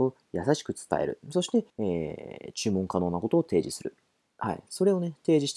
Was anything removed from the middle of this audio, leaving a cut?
yes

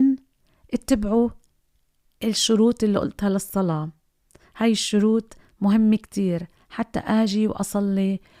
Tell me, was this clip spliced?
no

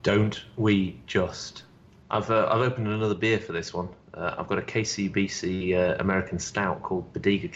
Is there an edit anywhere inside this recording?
no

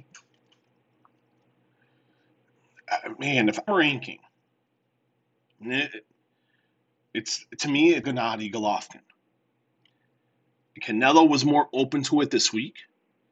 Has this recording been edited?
yes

